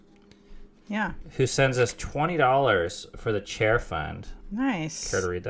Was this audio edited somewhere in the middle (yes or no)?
yes